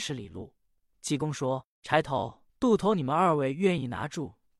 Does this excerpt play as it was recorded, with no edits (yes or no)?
no